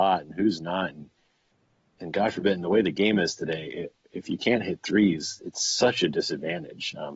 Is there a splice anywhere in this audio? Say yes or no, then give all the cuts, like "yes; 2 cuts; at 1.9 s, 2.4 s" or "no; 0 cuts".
no; 0 cuts